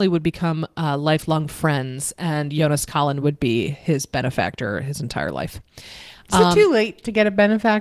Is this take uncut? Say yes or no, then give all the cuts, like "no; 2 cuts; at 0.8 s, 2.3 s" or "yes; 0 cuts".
yes; 0 cuts